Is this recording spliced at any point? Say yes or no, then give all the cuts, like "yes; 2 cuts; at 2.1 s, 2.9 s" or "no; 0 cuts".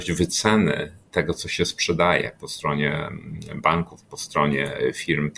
no; 0 cuts